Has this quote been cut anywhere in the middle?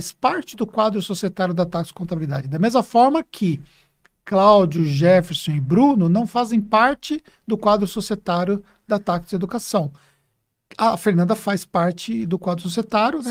no; 0 cuts

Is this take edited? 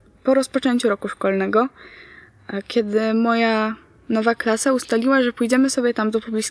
no; 0 cuts

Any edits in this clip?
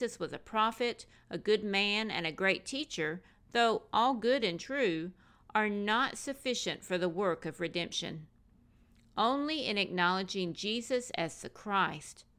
no; 0 cuts

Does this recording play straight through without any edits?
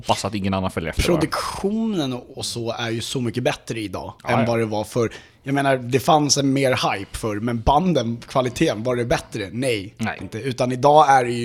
no; 3 cuts; at 2.3 s, 4.2 s, 10.2 s

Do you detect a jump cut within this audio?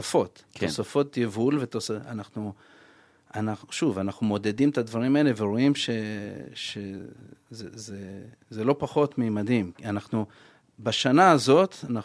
no; 0 cuts

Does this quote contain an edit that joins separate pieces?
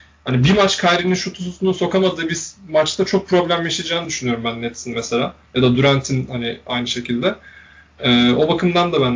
no; 0 cuts

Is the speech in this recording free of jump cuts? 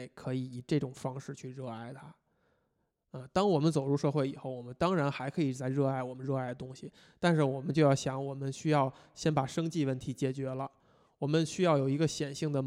yes; 0 cuts

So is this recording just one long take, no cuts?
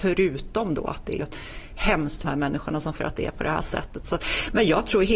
no; 3 cuts; at 1.2 s, 2.2 s, 3.0 s

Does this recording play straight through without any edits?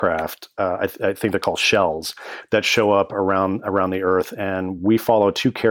yes; 0 cuts

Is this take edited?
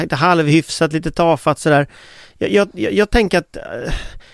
no; 0 cuts

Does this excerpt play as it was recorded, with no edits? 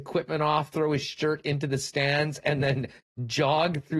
yes; 0 cuts

